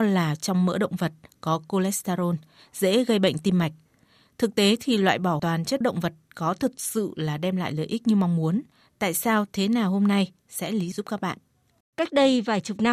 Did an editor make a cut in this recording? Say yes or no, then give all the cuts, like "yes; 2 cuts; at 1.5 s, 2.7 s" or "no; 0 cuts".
yes; 3 cuts; at 5.4 s, 5.8 s, 10.9 s